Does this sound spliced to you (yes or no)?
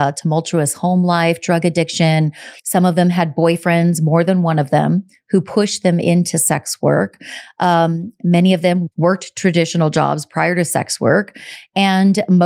yes